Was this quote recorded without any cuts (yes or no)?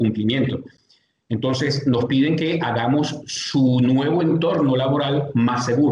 yes